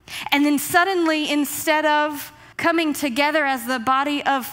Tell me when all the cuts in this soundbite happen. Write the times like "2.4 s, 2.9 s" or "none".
2.5 s